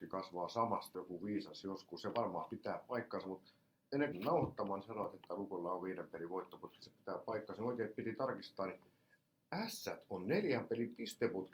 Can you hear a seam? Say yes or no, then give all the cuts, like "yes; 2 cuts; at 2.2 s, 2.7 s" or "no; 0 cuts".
yes; 2 cuts; at 0.9 s, 4.1 s